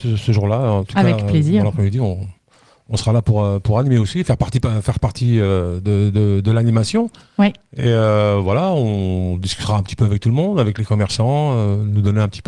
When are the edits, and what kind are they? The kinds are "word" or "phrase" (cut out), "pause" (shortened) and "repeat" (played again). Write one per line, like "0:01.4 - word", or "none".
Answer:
none